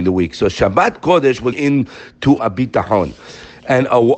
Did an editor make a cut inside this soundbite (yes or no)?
yes